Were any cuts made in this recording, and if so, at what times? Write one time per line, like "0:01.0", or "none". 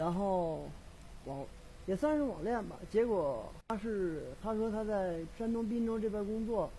0:01.0
0:03.6
0:04.3
0:05.3